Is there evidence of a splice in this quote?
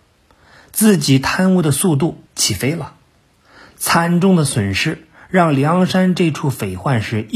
yes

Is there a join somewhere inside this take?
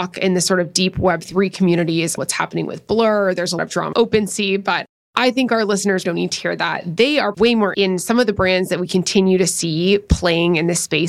yes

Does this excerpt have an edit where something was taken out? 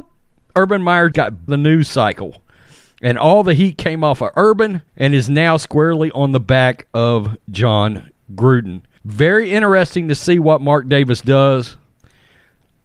yes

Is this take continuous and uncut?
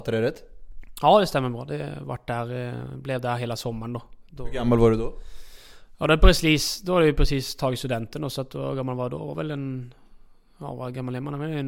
yes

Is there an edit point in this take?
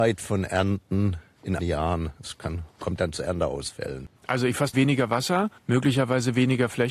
yes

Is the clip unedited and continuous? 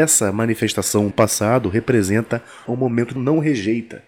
no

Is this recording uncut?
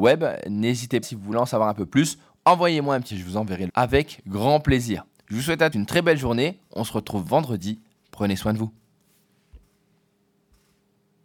no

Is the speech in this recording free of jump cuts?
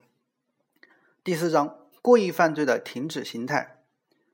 no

